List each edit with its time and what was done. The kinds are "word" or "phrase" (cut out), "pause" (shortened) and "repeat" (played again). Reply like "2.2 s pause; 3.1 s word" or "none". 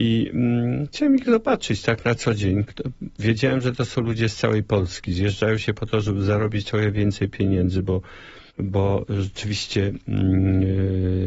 8.5 s pause

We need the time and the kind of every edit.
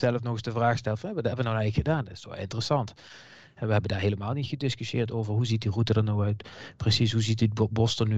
none

